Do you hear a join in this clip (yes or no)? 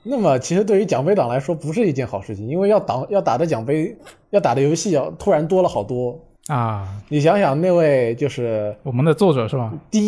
yes